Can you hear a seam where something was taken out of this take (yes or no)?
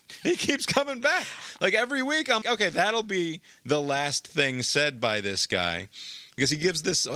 yes